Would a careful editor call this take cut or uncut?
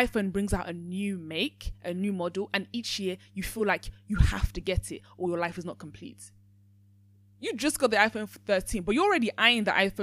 uncut